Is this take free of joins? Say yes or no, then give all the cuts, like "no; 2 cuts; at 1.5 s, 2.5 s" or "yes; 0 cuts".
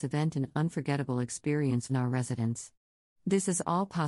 no; 1 cut; at 1.9 s